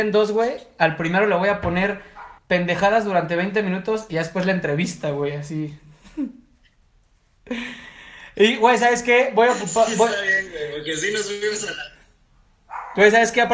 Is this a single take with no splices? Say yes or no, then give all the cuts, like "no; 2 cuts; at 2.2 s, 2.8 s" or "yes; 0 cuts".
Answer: no; 1 cut; at 2.4 s